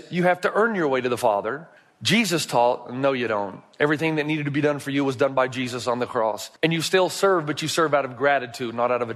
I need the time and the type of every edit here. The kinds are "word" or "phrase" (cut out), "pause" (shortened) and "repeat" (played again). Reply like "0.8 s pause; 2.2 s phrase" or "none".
1.8 s pause; 6.6 s pause